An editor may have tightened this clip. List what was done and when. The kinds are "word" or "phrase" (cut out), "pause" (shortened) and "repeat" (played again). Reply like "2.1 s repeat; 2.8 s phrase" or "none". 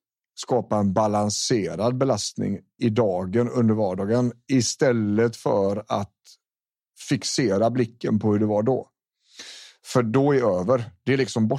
2.8 s word

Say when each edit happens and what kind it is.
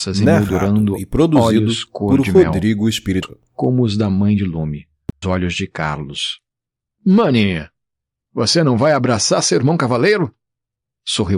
3.2 s word; 5.2 s word

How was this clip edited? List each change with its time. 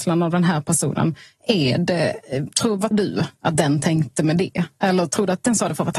2.9 s word

